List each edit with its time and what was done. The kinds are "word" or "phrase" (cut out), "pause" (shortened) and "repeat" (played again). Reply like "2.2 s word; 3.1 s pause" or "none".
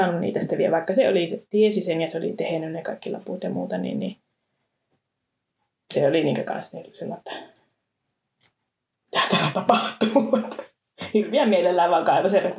none

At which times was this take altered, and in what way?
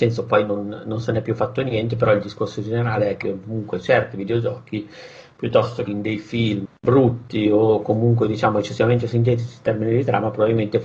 3.2 s phrase; 5.9 s phrase; 6.7 s word

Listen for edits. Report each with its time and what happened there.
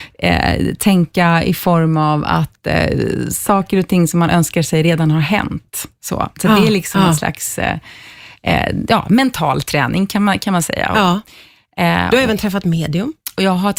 none

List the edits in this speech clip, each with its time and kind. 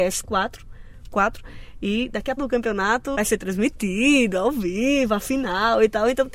1.1 s word; 2.4 s phrase; 3.1 s word

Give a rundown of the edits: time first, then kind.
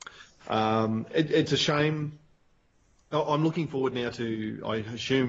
none

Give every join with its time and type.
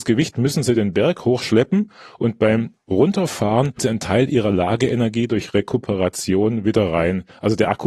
3.8 s word

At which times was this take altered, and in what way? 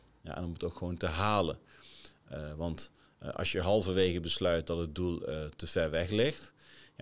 none

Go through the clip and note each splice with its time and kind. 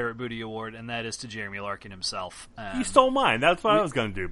none

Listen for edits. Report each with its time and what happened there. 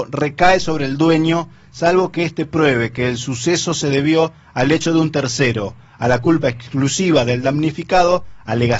none

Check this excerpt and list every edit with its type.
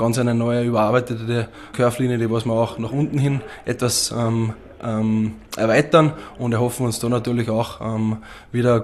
1.7 s word

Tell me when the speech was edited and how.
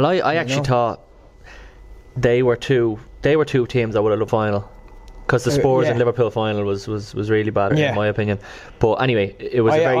4.3 s phrase; 7.7 s word

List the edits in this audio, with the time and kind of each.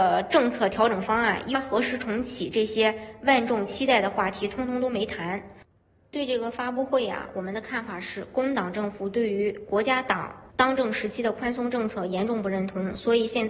1.5 s word; 10.5 s pause

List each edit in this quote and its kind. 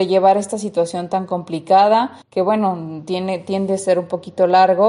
2.2 s pause

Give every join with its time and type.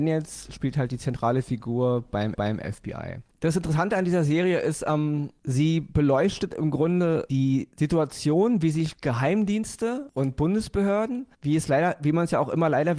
2.3 s repeat

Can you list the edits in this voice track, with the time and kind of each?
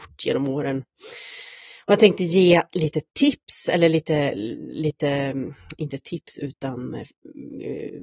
none

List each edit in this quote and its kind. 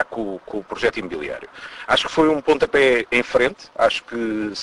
none

